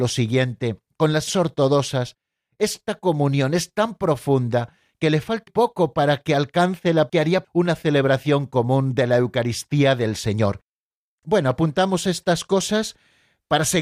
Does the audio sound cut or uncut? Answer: cut